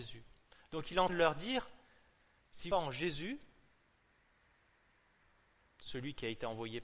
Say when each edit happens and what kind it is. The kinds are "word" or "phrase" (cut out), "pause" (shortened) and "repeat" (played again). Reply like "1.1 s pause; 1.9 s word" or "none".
1.1 s word; 2.7 s phrase